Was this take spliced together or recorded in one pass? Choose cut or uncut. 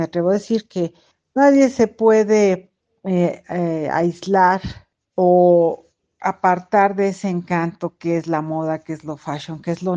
uncut